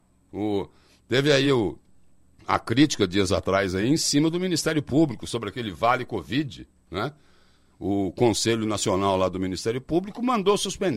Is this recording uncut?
yes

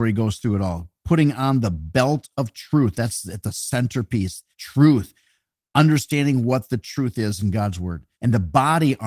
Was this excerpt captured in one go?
no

